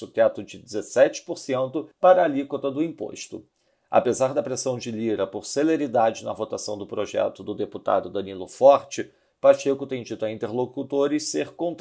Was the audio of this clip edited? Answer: yes; 1 cut; at 1.9 s

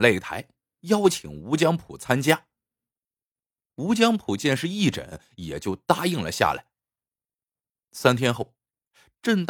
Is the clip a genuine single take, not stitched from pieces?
yes; 0 cuts

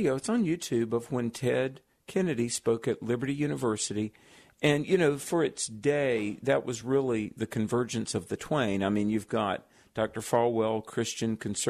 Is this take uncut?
yes; 0 cuts

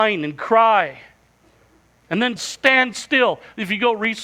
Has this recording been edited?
yes; 1 cut; at 2.4 s

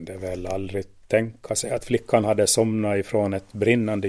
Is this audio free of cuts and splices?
yes; 0 cuts

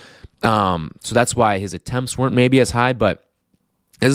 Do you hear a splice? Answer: no; 0 cuts

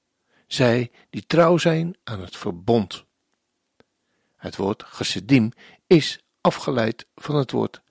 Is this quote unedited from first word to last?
yes; 0 cuts

